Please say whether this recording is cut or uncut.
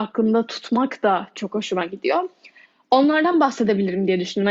uncut